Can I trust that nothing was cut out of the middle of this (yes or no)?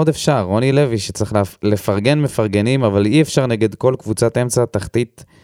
yes